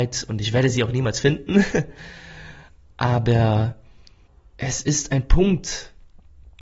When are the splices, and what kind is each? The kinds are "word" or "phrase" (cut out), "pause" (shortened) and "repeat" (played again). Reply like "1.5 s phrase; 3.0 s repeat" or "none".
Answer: none